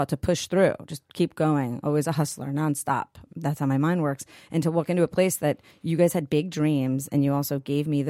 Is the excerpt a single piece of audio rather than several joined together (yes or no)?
yes